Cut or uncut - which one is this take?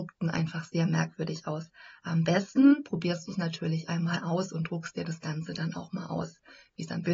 uncut